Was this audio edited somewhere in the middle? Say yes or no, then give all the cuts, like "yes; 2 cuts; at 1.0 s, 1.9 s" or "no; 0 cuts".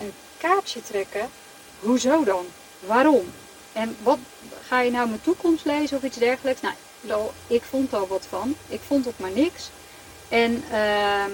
yes; 1 cut; at 7.1 s